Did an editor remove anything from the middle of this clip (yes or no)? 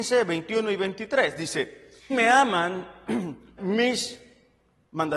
yes